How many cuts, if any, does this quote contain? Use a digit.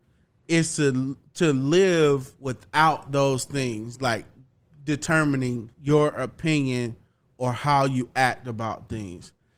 2